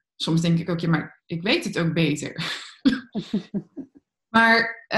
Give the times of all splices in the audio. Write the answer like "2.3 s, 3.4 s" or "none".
none